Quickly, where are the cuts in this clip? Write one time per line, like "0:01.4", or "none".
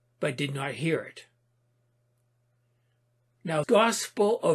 0:03.6